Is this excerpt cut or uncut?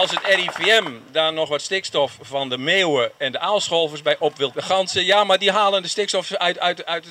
cut